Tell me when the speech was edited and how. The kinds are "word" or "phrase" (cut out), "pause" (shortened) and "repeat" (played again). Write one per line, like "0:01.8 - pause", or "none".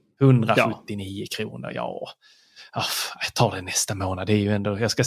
none